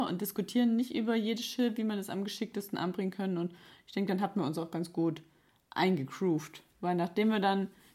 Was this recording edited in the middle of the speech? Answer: no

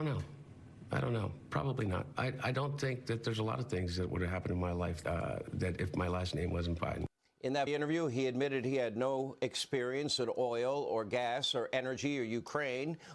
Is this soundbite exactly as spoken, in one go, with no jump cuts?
no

